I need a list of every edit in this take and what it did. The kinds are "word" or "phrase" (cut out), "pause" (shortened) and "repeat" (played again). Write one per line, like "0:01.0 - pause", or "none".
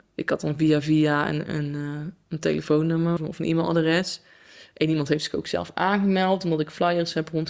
0:03.2 - word